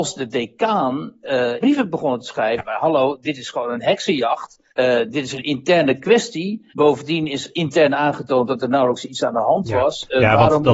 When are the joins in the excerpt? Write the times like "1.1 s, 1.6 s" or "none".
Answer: 1.6 s, 2.6 s, 4.7 s, 6.7 s, 7.5 s